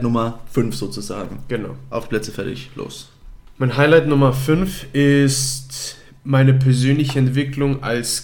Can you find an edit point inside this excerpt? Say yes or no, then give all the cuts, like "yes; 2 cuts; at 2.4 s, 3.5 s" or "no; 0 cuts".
no; 0 cuts